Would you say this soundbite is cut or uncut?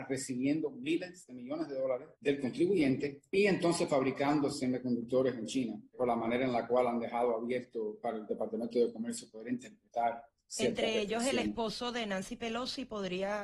cut